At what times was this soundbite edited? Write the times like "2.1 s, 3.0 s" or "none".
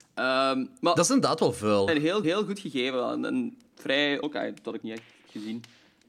1.9 s, 2.2 s, 4.2 s, 4.8 s